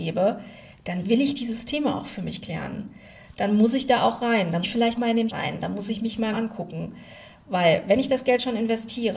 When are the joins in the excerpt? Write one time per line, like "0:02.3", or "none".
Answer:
0:04.6
0:04.9
0:05.3
0:06.3